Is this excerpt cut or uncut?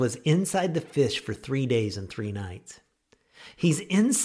uncut